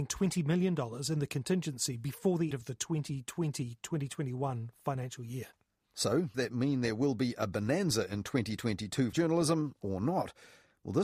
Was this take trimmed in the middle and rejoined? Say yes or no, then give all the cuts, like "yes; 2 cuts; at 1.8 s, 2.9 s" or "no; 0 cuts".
yes; 3 cuts; at 2.5 s, 6.3 s, 9.1 s